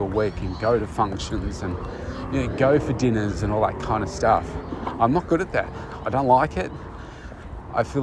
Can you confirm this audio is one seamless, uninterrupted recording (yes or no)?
yes